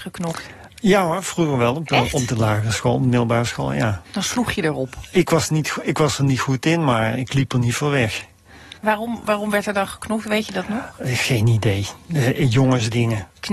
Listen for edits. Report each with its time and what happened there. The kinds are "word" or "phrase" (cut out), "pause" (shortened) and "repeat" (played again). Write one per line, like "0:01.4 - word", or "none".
0:04.1 - pause
0:08.8 - pause